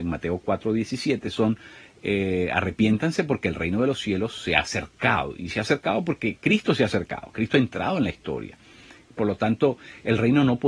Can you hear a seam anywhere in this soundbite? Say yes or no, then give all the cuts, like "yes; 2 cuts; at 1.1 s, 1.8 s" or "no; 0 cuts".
no; 0 cuts